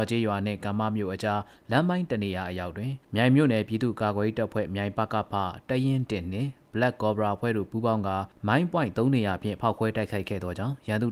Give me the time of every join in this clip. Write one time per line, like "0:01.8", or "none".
0:03.0